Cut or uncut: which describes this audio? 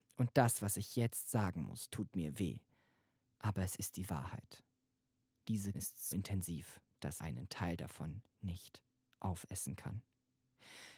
cut